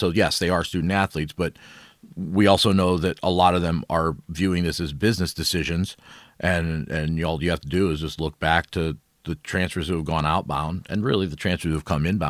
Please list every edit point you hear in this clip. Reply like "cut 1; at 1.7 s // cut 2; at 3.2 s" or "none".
none